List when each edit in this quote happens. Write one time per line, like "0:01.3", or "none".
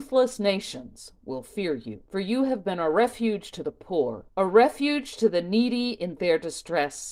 0:02.1
0:04.3